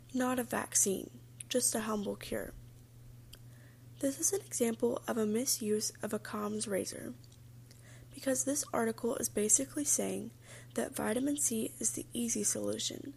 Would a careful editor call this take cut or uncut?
uncut